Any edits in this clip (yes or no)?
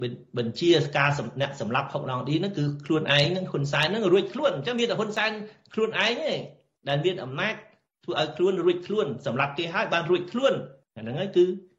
no